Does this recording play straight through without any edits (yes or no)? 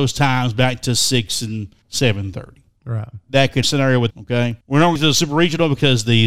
no